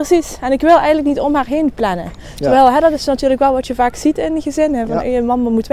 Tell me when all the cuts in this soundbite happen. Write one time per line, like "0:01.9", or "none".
none